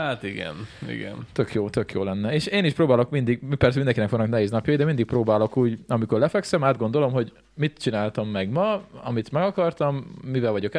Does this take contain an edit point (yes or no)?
no